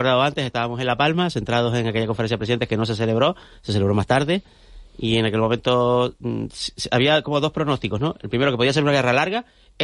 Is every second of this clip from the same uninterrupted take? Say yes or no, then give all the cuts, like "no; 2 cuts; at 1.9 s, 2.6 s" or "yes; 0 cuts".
yes; 0 cuts